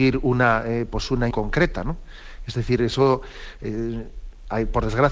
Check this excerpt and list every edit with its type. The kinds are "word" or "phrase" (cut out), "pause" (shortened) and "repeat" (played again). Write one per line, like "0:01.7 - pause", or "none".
0:01.3 - word